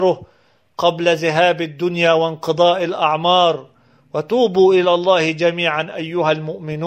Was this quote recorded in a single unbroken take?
yes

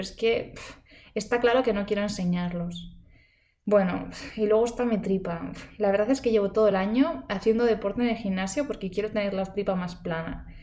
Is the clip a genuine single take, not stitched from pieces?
yes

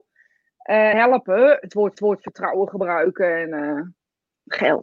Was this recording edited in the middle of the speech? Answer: yes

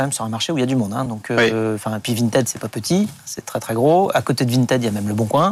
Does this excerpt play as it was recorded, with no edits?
yes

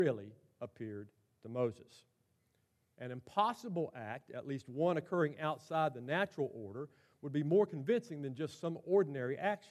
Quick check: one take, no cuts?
yes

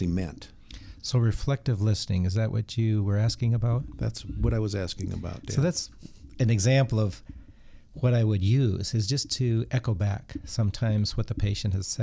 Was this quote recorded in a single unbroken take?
yes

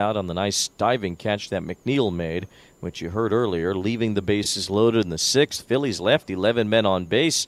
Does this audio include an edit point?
no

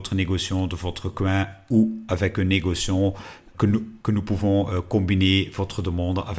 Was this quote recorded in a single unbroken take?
no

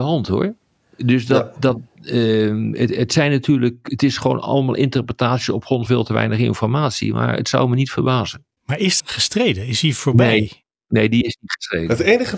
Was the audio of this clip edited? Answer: yes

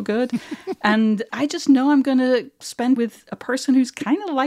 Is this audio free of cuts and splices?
no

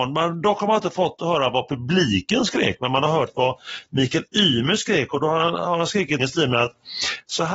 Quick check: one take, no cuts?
no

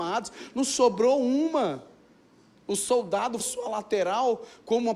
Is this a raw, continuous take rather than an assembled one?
no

